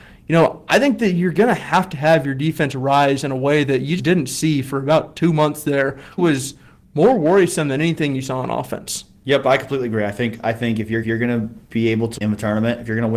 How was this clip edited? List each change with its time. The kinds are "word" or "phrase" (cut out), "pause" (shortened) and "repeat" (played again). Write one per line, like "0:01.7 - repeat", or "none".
0:04.0 - word
0:06.2 - phrase
0:11.0 - repeat
0:12.2 - word